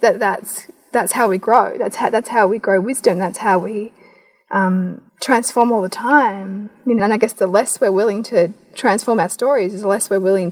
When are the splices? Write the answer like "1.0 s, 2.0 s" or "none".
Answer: 5.1 s, 7.0 s

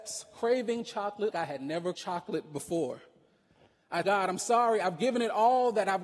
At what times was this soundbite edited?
1.3 s, 1.9 s, 4.0 s

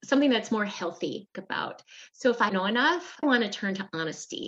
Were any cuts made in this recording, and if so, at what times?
1.3 s, 2.5 s, 3.2 s

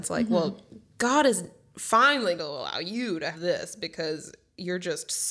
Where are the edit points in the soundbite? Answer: 2.4 s, 3.3 s

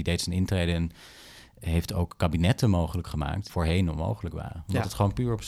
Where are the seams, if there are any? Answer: 3.5 s

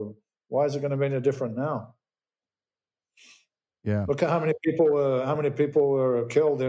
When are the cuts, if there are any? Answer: none

